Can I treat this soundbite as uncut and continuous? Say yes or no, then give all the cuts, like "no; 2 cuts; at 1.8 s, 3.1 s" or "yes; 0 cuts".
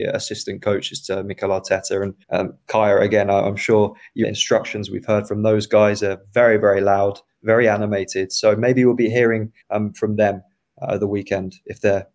no; 3 cuts; at 2.2 s, 4.2 s, 9.6 s